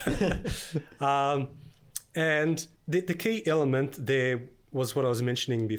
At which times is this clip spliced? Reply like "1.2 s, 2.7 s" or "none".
2.8 s